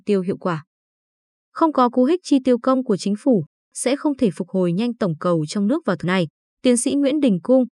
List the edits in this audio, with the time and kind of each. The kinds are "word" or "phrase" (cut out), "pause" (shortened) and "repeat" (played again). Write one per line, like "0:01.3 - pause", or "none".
0:06.0 - word